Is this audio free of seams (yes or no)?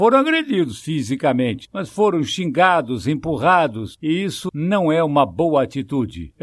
no